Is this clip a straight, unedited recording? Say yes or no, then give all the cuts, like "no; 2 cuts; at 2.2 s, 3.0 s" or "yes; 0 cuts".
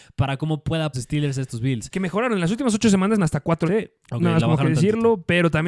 no; 3 cuts; at 0.9 s, 3.2 s, 3.7 s